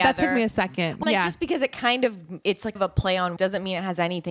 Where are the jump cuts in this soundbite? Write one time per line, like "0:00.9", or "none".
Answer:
0:01.0
0:02.4
0:02.8
0:03.4